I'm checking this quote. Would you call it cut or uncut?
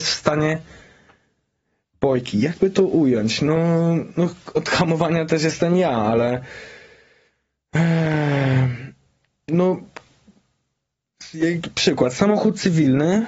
uncut